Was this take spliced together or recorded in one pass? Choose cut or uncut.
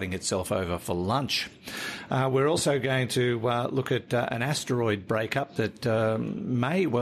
uncut